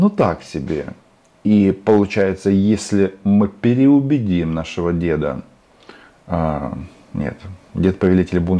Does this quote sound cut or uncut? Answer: cut